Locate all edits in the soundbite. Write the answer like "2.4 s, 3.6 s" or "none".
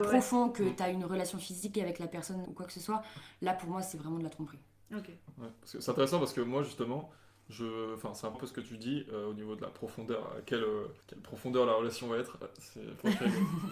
2.4 s, 8.3 s, 11.0 s

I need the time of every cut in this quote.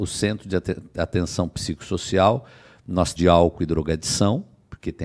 3.2 s

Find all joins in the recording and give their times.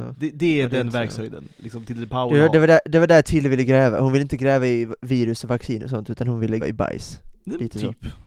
6.6 s

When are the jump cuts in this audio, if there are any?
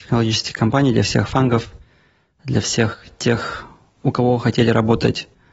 none

